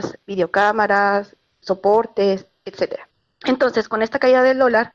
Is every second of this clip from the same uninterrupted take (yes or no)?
no